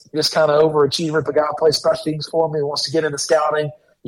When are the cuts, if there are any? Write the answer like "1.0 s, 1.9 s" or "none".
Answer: 1.3 s